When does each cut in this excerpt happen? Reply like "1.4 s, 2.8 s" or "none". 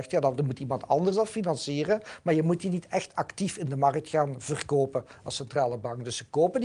none